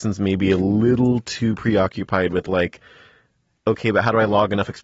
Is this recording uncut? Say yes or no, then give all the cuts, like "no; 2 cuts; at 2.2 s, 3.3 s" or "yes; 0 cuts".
yes; 0 cuts